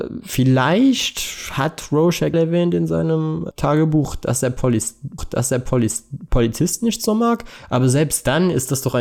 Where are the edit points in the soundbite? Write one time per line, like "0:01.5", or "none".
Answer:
0:02.3
0:03.5
0:05.2